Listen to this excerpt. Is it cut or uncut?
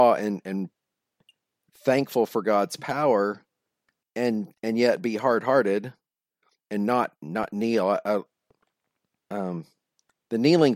uncut